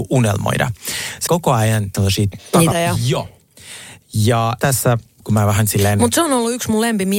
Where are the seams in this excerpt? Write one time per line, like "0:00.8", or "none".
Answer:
0:01.3
0:01.9
0:02.7
0:04.6
0:05.2